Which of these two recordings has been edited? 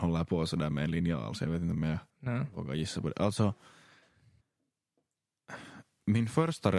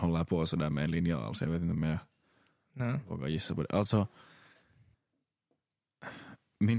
first; 1 cut; at 2.1 s

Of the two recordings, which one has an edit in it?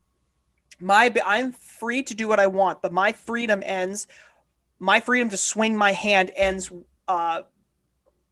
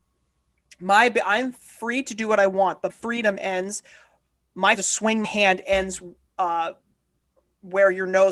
second; 3 cuts; at 2.9 s, 4.7 s, 5.2 s

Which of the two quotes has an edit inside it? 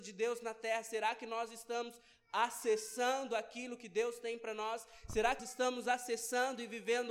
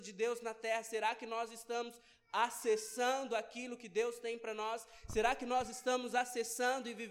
first; 1 cut; at 5.4 s

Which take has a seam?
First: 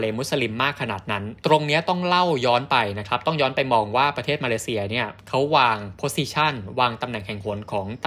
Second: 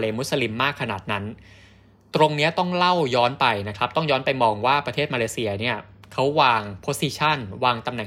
first; 2 cuts; at 1.4 s, 5.2 s

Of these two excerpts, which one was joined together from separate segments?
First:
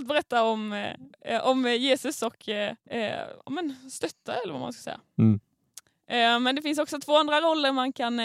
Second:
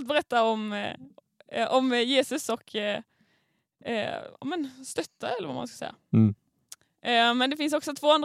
first; 2 cuts; at 1.1 s, 2.8 s

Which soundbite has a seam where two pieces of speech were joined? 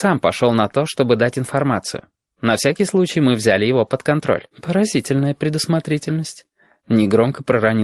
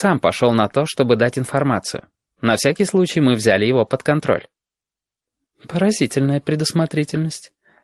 first; 1 cut; at 4.5 s

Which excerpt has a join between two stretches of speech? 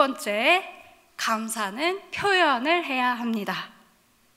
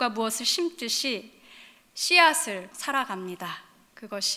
second; 1 cut; at 2.7 s

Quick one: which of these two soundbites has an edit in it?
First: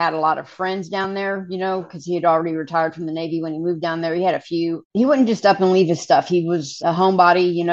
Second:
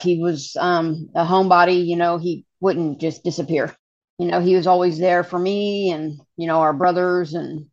first; 1 cut; at 6.8 s

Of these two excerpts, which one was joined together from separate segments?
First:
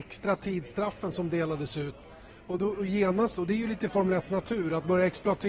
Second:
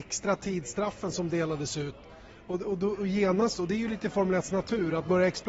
first; 1 cut; at 2.6 s

